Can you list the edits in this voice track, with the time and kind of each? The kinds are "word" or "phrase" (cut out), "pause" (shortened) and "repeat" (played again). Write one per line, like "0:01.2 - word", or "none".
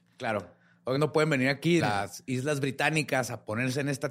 0:01.0 - word
0:01.8 - word